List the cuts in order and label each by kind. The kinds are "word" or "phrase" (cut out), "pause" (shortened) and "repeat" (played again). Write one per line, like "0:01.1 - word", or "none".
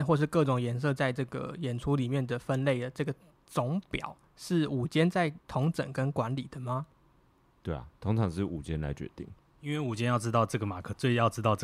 0:05.4 - pause